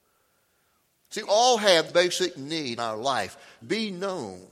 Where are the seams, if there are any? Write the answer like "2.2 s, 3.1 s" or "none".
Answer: 1.2 s, 1.9 s, 2.8 s, 3.6 s